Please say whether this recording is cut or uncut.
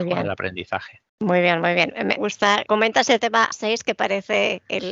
cut